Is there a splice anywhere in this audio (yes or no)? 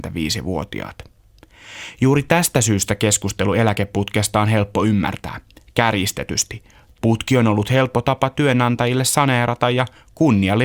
no